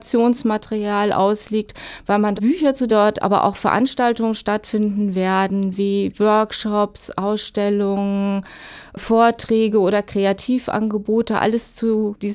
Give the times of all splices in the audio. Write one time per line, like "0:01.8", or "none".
0:02.4
0:02.9